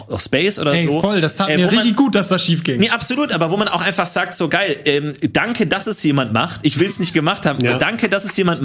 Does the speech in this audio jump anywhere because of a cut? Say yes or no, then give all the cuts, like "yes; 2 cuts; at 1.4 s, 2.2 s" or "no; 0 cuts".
no; 0 cuts